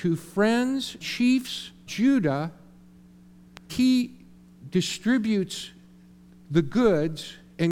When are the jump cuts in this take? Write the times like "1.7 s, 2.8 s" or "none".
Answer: 1.0 s, 1.9 s, 3.7 s